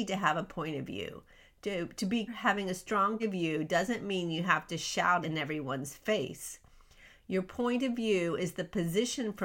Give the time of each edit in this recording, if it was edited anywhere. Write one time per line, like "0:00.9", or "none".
0:02.3
0:03.2
0:05.2